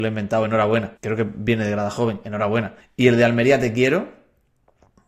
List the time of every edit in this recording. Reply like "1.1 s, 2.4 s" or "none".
1.0 s, 2.8 s